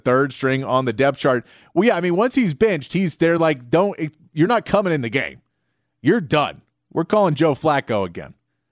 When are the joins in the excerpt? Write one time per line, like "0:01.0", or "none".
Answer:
none